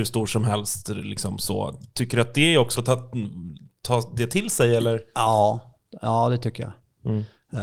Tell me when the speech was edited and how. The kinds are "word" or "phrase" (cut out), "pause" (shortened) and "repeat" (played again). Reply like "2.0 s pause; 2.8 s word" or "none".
2.7 s word